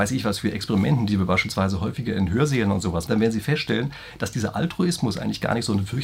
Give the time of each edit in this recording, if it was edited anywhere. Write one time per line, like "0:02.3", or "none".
0:03.1